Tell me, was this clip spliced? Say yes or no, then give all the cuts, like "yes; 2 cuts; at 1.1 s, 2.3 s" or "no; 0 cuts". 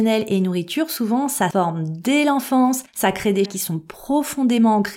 yes; 3 cuts; at 1.5 s, 2.9 s, 3.5 s